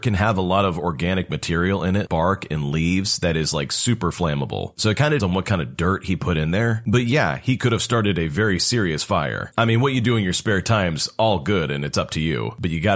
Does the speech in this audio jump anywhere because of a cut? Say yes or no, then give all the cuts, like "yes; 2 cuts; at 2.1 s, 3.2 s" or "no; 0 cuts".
yes; 2 cuts; at 2.1 s, 5.2 s